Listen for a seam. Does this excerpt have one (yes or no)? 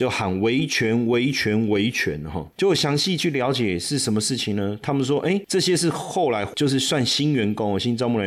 no